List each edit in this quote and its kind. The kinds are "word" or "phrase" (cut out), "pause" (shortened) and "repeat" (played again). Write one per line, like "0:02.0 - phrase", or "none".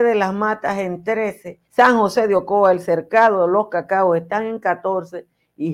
0:01.6 - pause